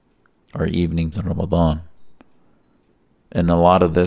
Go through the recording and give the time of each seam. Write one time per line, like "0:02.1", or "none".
0:01.1